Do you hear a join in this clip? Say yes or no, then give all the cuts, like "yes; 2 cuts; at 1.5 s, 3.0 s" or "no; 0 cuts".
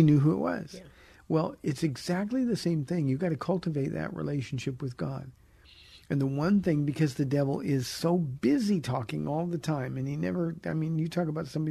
no; 0 cuts